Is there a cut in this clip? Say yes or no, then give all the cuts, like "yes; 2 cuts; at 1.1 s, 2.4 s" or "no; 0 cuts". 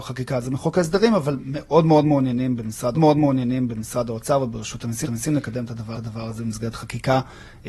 yes; 3 cuts; at 2.9 s, 5.0 s, 5.9 s